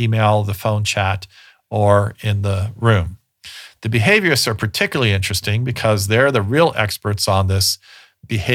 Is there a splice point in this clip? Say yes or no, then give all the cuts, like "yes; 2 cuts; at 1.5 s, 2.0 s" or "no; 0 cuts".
no; 0 cuts